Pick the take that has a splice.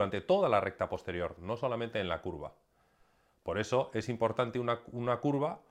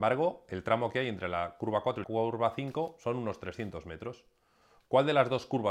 second; 1 cut; at 2.0 s

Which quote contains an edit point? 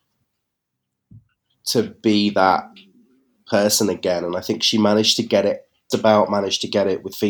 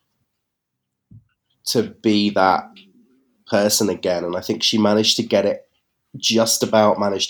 first; 1 cut; at 5.9 s

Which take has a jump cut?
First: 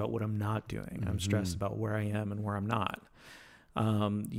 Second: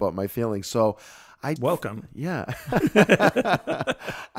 second; 1 cut; at 1.6 s

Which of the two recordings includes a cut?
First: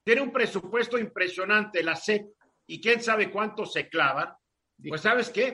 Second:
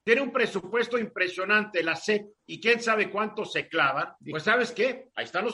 second; 2 cuts; at 2.4 s, 4.2 s

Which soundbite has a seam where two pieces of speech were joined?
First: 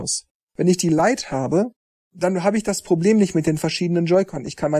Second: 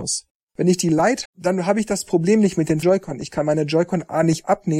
second; 2 cuts; at 1.2 s, 2.8 s

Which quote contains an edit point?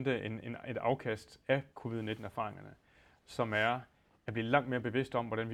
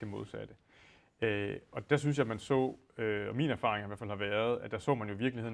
first; 1 cut; at 1.7 s

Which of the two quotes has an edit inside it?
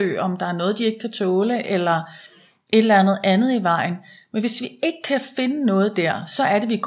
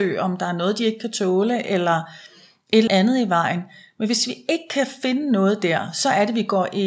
second; 1 cut; at 2.9 s

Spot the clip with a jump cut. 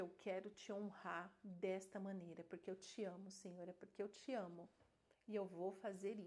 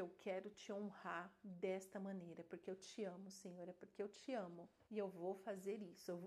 second; 1 cut; at 4.9 s

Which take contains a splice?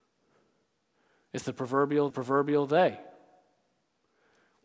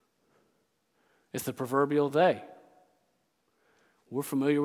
first; 1 cut; at 2.1 s

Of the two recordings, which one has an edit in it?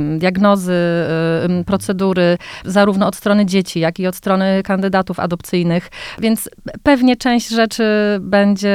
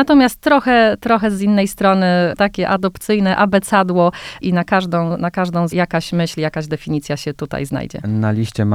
second; 3 cuts; at 2.4 s, 4.4 s, 5.7 s

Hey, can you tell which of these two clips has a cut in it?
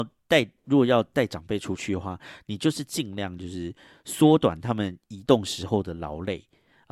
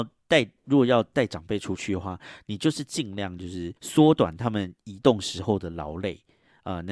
second; 1 cut; at 3.8 s

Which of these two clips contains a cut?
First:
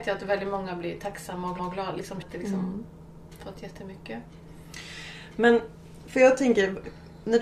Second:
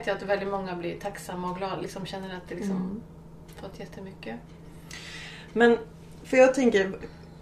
first; 2 cuts; at 1.6 s, 2.2 s

